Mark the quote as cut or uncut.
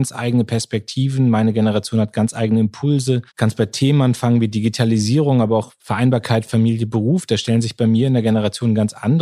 cut